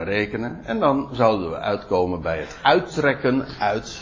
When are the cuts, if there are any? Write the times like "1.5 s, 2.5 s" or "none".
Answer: none